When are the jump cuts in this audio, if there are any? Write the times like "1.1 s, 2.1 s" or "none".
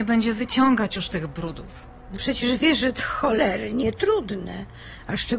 2.1 s, 3.0 s